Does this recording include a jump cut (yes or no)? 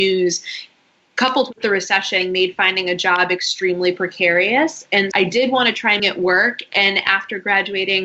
yes